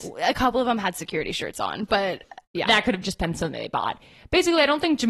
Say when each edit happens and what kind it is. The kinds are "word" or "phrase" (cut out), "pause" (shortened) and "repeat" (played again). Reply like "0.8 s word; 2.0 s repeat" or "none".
none